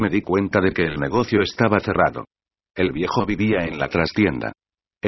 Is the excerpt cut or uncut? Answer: uncut